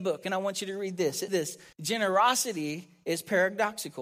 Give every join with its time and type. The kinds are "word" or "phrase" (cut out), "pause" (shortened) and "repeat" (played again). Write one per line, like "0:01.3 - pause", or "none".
0:01.3 - word
0:01.7 - pause